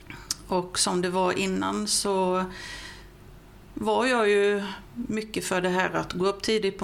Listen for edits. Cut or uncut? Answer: uncut